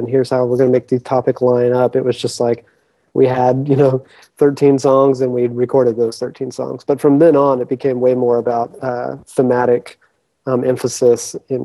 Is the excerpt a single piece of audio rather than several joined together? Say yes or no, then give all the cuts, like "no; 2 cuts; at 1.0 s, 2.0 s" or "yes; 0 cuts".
yes; 0 cuts